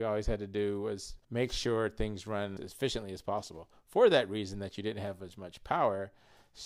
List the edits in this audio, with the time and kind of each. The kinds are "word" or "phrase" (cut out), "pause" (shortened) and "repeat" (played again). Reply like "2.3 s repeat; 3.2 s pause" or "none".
1.2 s pause; 2.6 s word